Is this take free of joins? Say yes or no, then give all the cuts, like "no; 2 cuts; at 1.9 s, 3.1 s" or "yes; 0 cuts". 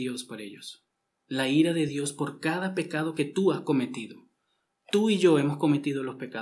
yes; 0 cuts